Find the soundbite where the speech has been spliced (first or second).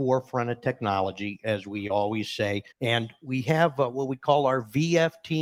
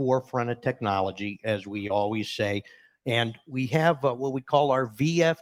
first